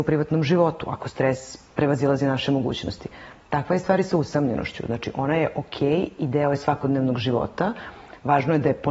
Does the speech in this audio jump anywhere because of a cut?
no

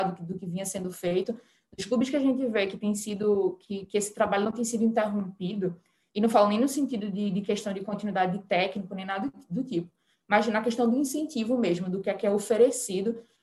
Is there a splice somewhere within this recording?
no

